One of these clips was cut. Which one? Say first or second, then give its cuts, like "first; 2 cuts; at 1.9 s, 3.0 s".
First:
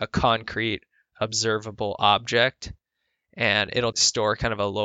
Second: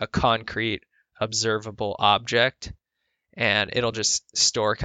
first; 1 cut; at 3.9 s